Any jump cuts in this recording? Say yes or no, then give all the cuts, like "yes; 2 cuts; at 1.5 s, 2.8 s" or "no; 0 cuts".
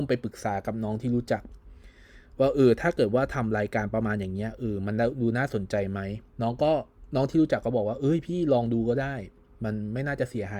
yes; 1 cut; at 6.3 s